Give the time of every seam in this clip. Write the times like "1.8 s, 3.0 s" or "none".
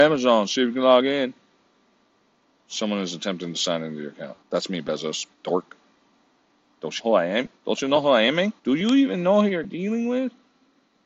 4.4 s, 5.3 s, 7.0 s, 7.6 s, 8.6 s